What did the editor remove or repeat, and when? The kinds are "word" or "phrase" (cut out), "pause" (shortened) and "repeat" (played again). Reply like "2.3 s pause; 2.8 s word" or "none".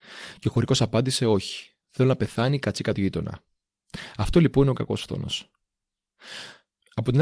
none